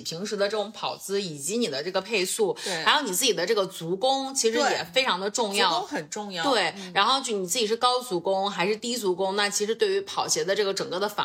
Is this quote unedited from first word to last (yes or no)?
yes